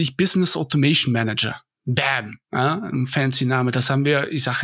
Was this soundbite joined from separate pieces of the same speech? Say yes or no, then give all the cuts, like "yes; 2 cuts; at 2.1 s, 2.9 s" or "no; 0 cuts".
yes; 1 cut; at 2.4 s